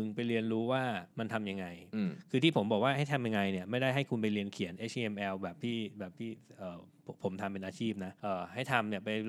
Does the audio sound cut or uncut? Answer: cut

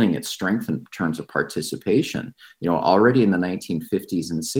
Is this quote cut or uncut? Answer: uncut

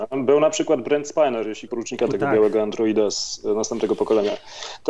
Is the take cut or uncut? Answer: cut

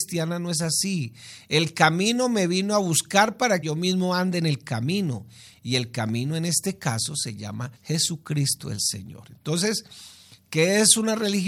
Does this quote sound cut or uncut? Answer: cut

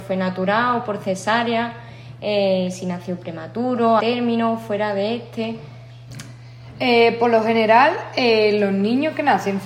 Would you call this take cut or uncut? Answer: cut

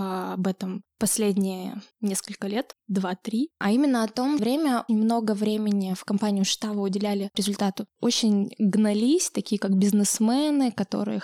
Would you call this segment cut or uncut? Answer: cut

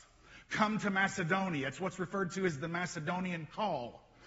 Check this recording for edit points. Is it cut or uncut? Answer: uncut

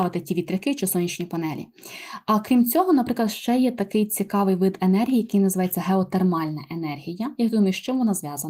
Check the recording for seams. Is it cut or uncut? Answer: uncut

